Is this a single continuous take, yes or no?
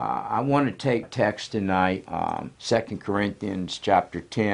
no